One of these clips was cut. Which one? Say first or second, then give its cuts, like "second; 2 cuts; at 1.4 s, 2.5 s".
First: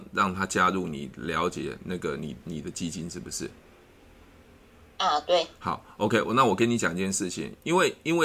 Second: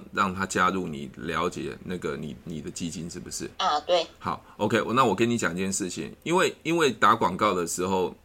second; 1 cut; at 3.5 s